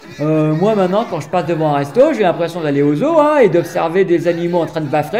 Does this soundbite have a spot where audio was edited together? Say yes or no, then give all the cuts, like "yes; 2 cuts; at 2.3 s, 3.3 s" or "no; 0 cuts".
no; 0 cuts